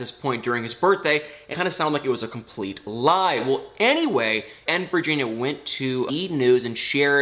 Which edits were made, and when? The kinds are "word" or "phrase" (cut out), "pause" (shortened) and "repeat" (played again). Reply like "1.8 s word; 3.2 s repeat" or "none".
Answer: 1.5 s word; 4.7 s word; 6.1 s word